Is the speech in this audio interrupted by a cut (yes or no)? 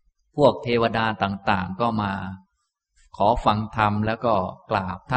no